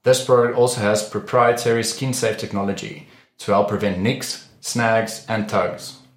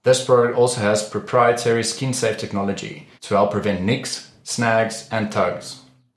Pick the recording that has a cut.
second; 1 cut; at 3.2 s

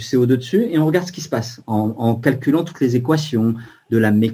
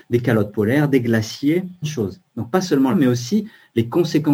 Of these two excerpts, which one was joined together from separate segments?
second; 2 cuts; at 1.8 s, 2.9 s

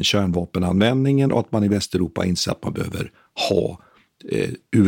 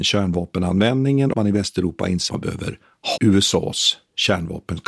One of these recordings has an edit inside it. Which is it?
second; 3 cuts; at 1.3 s, 2.3 s, 3.2 s

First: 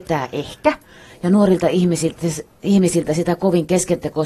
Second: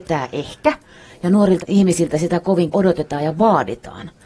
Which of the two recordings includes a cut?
second; 2 cuts; at 1.6 s, 2.7 s

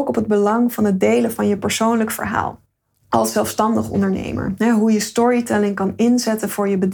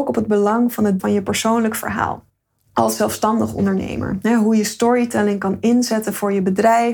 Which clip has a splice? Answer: second; 1 cut; at 1.0 s

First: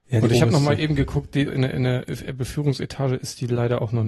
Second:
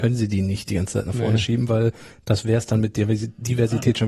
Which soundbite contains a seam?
first; 1 cut; at 1.5 s

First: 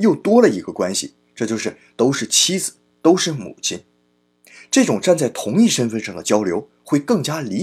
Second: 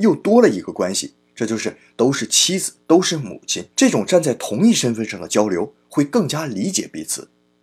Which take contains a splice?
second; 2 cuts; at 2.8 s, 3.7 s

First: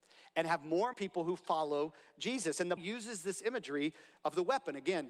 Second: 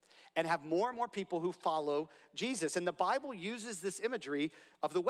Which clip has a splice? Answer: first; 2 cuts; at 0.9 s, 2.8 s

